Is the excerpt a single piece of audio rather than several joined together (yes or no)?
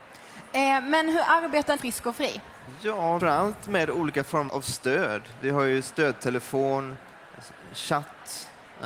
no